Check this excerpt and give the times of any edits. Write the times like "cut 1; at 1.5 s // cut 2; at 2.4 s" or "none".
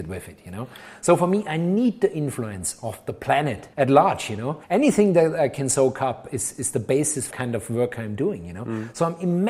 cut 1; at 3.7 s // cut 2; at 4.6 s // cut 3; at 6.6 s // cut 4; at 7.3 s